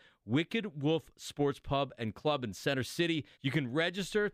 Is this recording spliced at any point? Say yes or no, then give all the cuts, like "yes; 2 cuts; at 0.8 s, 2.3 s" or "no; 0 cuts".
yes; 1 cut; at 3.3 s